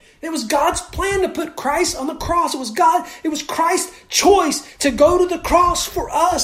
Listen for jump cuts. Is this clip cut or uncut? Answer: uncut